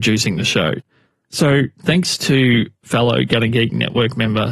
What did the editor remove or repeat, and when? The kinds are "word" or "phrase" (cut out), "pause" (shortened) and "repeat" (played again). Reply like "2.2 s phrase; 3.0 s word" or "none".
none